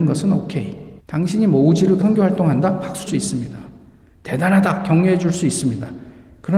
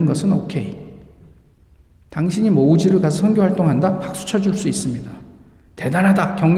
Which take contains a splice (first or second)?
first